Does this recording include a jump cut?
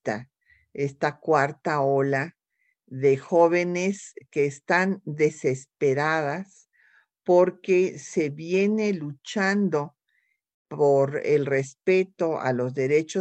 no; 0 cuts

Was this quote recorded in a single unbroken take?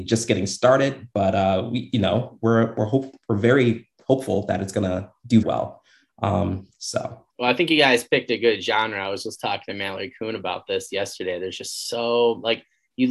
no; 2 cuts; at 5.4 s, 7.3 s

